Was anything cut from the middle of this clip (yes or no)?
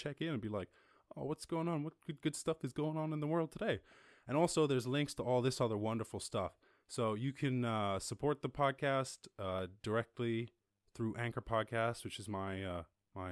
no